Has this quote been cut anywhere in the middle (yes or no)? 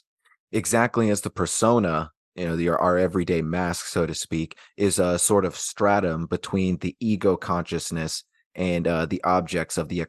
no